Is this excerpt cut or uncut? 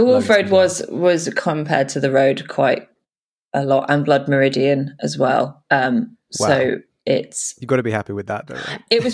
uncut